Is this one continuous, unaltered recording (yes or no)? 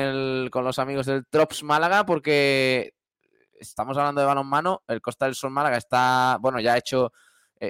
yes